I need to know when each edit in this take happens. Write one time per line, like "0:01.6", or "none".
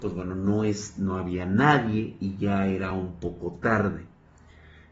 none